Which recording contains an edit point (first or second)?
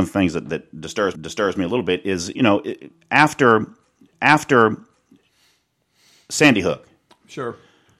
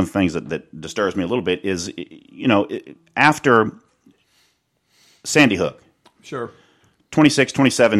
first